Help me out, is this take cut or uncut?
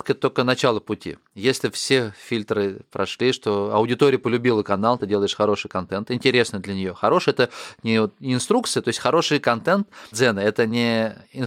cut